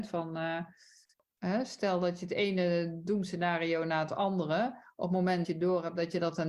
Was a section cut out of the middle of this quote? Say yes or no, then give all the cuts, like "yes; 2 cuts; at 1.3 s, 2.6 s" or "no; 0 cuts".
yes; 1 cut; at 5.4 s